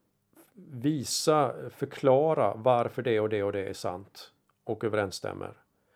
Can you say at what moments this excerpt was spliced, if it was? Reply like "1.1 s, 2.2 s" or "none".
none